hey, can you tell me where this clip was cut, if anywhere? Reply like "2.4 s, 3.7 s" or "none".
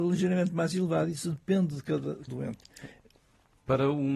2.3 s